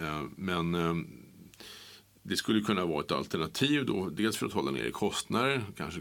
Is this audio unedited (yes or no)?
yes